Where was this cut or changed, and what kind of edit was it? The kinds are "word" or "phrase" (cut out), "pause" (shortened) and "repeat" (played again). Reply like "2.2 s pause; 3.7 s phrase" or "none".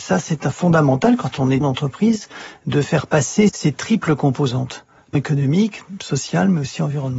1.6 s word; 3.5 s word; 5.1 s word